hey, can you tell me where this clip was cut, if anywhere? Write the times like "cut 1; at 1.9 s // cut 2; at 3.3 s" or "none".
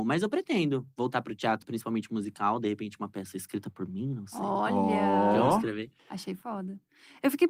cut 1; at 1.6 s // cut 2; at 6.0 s